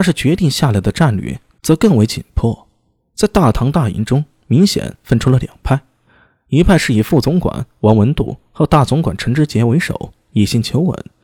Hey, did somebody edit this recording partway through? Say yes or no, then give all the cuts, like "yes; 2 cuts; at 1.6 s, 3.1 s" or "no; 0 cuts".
no; 0 cuts